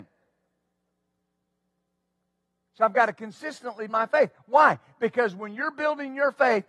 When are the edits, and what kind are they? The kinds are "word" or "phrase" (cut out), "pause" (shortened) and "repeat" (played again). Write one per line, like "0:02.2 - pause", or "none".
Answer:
0:03.9 - word